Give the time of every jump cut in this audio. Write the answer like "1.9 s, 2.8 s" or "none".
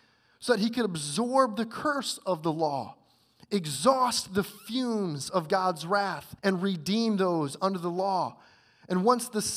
6.4 s